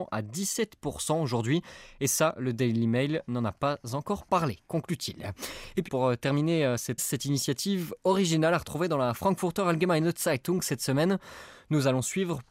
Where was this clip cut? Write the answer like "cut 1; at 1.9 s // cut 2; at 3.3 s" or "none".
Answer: cut 1; at 5.9 s // cut 2; at 7.0 s